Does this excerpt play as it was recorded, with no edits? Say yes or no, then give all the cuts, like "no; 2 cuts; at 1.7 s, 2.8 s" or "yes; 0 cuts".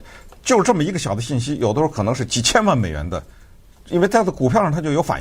yes; 0 cuts